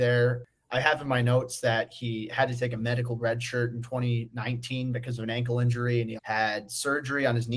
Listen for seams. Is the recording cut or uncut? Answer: cut